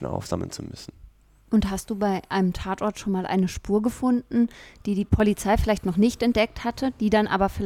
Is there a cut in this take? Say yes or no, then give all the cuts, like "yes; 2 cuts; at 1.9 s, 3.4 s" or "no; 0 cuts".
no; 0 cuts